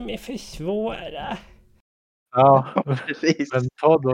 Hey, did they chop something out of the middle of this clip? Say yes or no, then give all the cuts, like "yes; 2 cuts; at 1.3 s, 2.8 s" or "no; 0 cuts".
no; 0 cuts